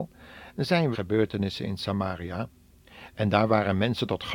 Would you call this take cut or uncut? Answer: cut